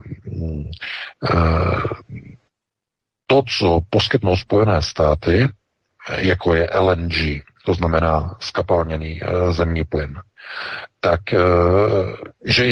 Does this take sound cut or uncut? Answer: uncut